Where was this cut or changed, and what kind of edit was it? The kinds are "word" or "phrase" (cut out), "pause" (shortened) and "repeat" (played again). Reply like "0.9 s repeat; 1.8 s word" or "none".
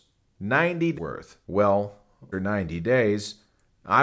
0.9 s word; 2.3 s word